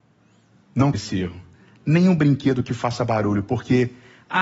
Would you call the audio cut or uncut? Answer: cut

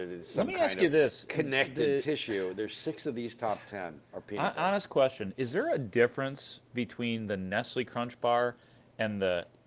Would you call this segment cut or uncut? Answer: cut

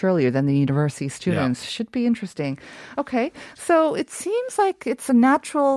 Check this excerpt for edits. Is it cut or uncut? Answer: uncut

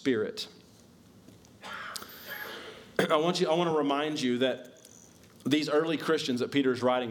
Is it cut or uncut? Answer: uncut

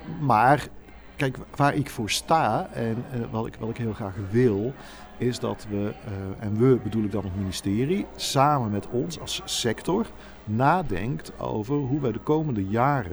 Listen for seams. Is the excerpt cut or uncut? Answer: uncut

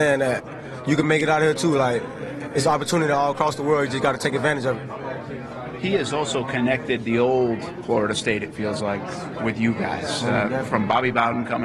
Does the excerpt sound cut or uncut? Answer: uncut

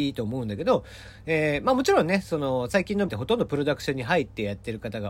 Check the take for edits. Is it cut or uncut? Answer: cut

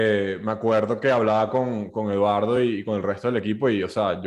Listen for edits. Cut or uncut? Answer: uncut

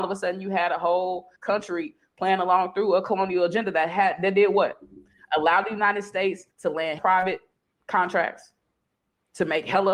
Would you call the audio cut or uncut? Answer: cut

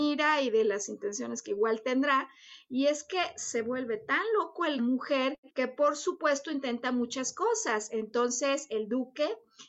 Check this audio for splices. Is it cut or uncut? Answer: cut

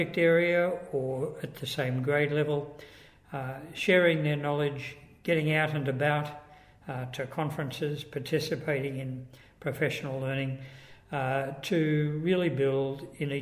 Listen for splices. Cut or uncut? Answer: uncut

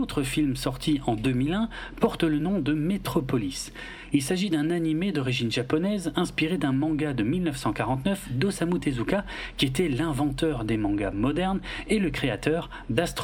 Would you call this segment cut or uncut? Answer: uncut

